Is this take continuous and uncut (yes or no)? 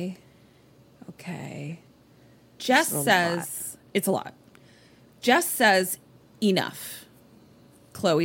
yes